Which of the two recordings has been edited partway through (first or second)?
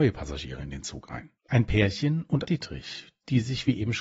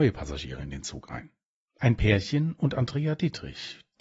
first